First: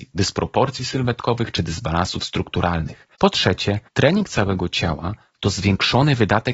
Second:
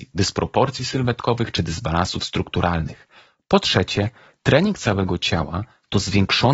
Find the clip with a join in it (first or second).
first